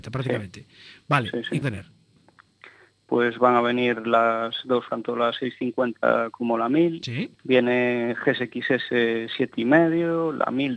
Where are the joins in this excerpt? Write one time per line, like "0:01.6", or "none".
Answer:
0:01.6
0:04.9
0:07.3